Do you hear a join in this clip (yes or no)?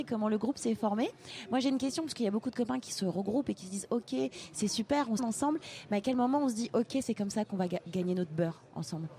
yes